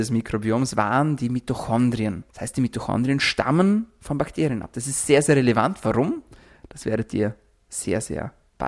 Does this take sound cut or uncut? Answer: cut